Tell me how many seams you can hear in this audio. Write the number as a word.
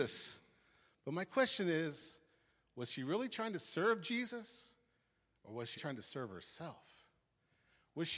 one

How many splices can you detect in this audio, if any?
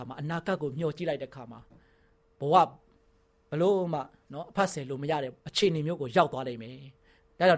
one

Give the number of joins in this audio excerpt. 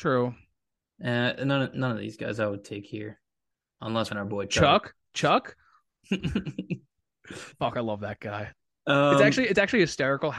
one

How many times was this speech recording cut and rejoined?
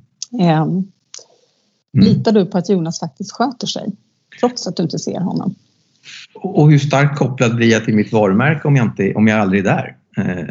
zero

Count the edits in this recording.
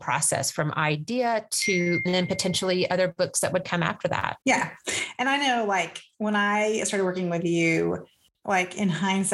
three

